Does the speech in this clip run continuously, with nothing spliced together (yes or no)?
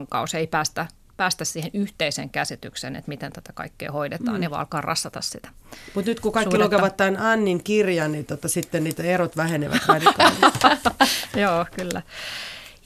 yes